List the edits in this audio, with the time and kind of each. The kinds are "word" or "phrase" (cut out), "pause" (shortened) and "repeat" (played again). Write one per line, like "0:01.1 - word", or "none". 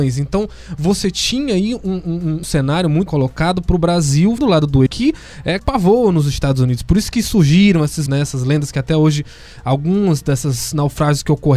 0:02.4 - word
0:03.1 - word
0:04.4 - word
0:04.9 - word
0:05.6 - word
0:08.1 - word

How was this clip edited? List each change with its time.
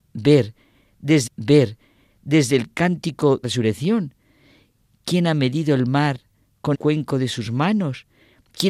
0:01.3 - repeat
0:03.4 - phrase
0:06.7 - word

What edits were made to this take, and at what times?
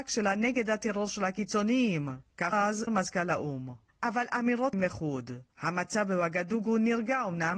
0:02.5 - word
0:02.9 - word
0:04.7 - phrase
0:05.5 - pause

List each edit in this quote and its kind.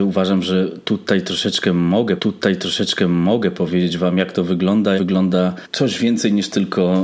0:02.2 - repeat
0:05.0 - word

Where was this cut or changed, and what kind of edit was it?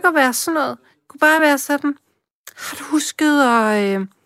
none

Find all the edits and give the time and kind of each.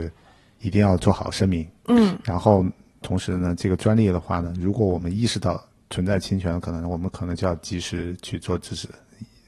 none

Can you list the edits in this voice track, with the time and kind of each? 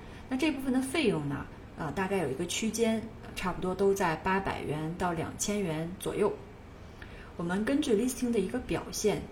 none

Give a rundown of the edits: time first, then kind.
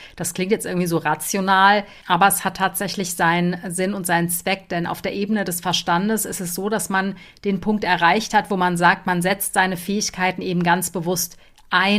none

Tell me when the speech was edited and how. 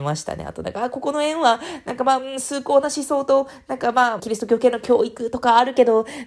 0:04.2 - phrase

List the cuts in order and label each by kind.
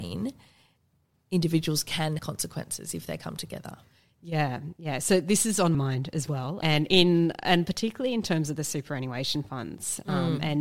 0:02.2 - word
0:05.7 - word
0:06.6 - word

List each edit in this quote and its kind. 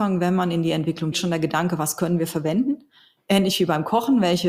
0:01.1 - word

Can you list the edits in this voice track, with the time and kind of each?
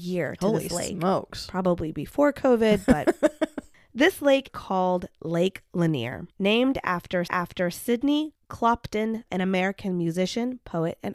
0:04.5 - word
0:06.3 - pause
0:07.3 - repeat
0:09.3 - word

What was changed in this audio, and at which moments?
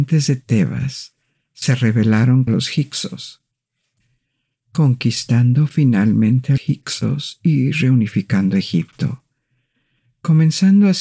0:02.5 - word
0:06.6 - word

